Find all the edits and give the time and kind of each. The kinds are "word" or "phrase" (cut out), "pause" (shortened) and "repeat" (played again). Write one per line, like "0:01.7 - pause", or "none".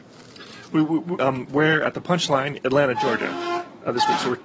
0:01.2 - word
0:02.6 - word